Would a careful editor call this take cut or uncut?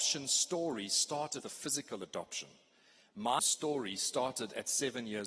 cut